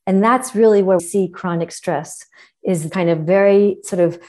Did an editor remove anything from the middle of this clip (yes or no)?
yes